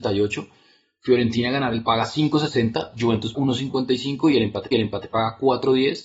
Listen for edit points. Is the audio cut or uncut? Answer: cut